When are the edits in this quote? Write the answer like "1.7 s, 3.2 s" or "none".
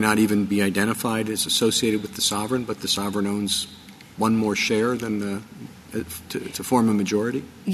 none